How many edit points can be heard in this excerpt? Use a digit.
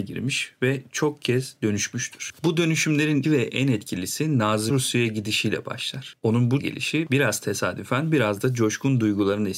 3